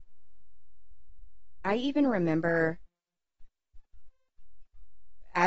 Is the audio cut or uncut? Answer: uncut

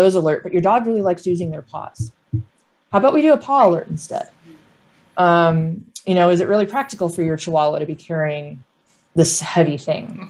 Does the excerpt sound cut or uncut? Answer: uncut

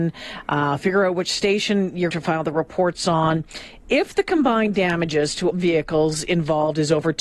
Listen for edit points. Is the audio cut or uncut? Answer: cut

